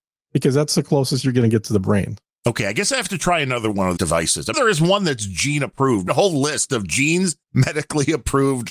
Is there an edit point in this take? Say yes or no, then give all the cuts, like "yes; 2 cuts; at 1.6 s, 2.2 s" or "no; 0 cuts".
yes; 5 cuts; at 2.3 s, 4.0 s, 4.5 s, 6.1 s, 7.4 s